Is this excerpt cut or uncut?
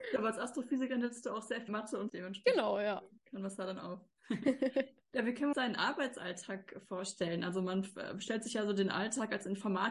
cut